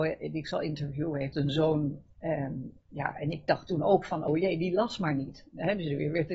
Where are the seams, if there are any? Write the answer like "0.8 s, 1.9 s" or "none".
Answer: 1.3 s, 4.3 s